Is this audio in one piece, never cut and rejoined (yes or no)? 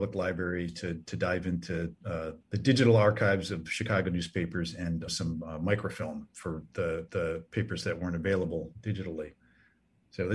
no